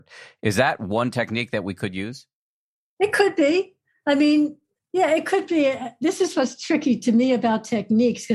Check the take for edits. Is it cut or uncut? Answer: uncut